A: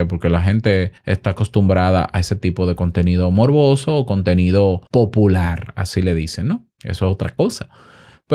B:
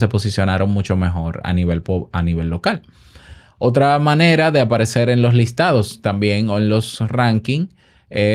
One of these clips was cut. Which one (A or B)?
A